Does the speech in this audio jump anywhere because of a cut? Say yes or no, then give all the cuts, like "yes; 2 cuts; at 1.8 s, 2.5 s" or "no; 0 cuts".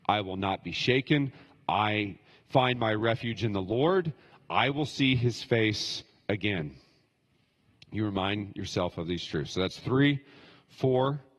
no; 0 cuts